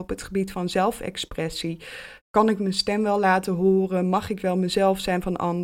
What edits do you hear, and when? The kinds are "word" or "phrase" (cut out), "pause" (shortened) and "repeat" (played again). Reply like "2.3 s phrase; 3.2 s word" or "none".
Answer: none